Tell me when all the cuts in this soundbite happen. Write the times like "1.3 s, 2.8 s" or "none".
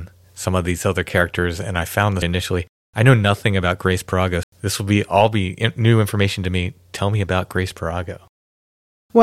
2.2 s, 4.4 s